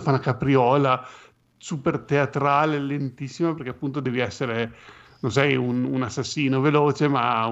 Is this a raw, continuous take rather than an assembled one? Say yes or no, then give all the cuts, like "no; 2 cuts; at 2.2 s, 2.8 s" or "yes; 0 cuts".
yes; 0 cuts